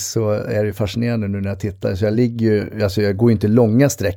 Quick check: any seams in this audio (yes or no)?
no